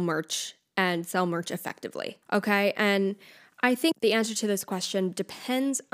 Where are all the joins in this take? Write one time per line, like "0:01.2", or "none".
0:02.2